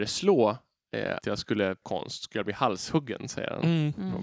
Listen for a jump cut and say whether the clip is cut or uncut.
cut